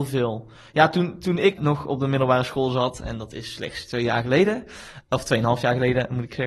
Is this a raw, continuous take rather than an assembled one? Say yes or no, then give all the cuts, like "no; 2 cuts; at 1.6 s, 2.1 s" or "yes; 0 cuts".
no; 1 cut; at 1.6 s